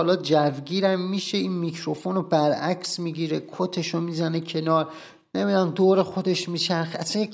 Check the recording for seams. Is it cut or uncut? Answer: uncut